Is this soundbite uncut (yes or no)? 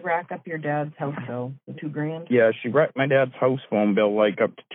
no